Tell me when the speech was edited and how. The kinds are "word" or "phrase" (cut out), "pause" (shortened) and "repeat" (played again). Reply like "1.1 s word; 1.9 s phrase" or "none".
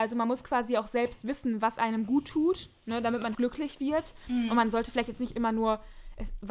3.3 s word